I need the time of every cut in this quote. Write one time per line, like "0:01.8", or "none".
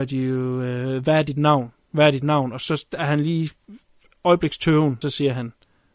0:05.0